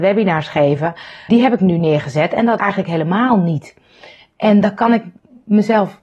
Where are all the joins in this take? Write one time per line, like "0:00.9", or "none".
0:01.3
0:02.6